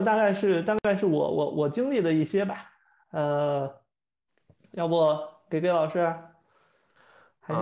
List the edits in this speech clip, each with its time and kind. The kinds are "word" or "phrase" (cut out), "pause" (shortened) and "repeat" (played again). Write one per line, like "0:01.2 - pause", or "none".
none